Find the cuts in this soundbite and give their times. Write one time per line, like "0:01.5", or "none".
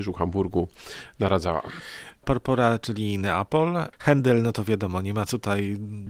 none